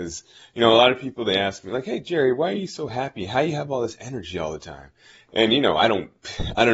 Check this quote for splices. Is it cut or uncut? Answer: uncut